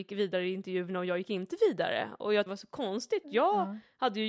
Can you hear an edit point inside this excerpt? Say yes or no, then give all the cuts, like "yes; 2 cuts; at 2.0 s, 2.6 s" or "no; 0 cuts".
yes; 2 cuts; at 2.5 s, 3.2 s